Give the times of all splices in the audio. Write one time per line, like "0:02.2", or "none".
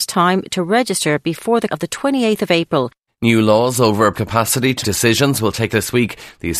0:01.7
0:03.1
0:04.1
0:04.8
0:05.7